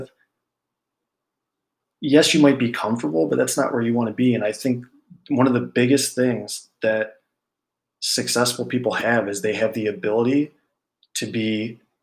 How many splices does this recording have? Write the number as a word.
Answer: zero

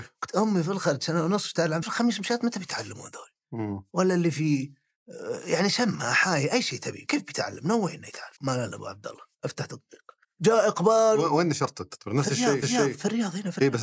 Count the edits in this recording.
five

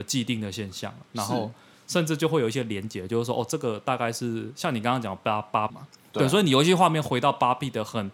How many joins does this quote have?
two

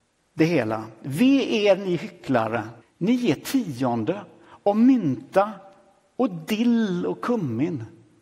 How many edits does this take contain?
one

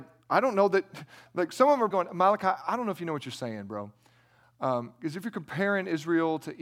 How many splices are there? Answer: one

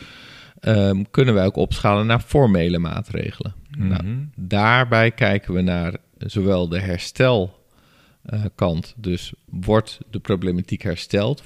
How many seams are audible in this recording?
zero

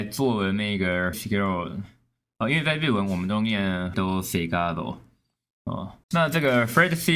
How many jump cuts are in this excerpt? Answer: three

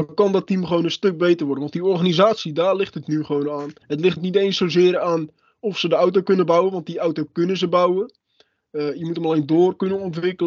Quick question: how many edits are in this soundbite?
two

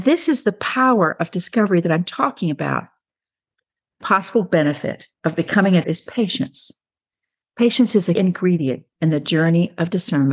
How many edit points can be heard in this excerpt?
four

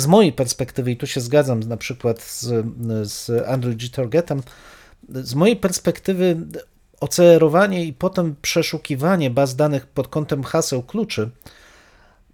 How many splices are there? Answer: zero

